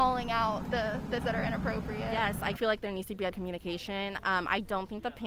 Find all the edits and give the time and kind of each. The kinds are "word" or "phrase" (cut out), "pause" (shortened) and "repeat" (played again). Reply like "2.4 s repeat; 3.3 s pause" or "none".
1.2 s word; 2.5 s word; 3.3 s word